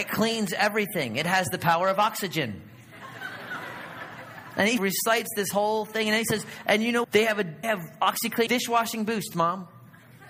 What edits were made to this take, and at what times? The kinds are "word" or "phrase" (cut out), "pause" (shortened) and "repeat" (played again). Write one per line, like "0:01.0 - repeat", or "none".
0:04.8 - word
0:07.0 - word
0:07.6 - word
0:08.5 - word